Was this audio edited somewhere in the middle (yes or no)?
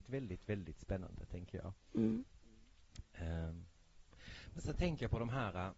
no